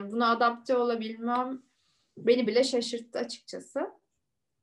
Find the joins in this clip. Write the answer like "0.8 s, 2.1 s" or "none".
none